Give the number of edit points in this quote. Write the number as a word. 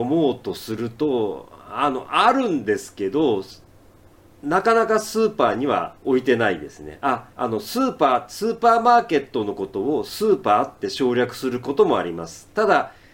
two